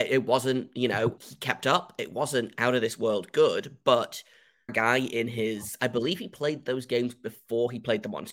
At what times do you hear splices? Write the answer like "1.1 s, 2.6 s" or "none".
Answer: 1.2 s, 4.7 s